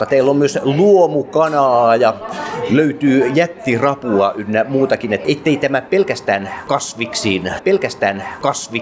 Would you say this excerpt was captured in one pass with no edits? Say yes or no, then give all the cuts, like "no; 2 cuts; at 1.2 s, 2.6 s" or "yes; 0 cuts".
no; 1 cut; at 7.6 s